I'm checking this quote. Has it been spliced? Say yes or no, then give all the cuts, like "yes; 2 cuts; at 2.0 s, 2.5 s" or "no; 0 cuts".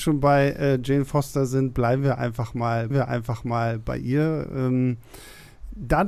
yes; 1 cut; at 2.9 s